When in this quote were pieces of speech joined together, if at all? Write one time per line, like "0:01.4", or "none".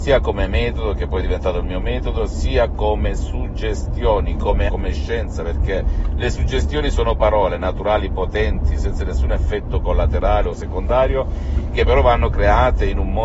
0:04.7